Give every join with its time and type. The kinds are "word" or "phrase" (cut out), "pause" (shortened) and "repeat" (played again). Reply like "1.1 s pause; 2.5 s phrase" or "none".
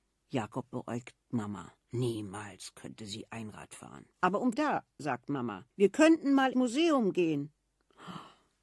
1.8 s pause; 4.1 s pause; 4.5 s phrase; 5.7 s pause; 6.5 s word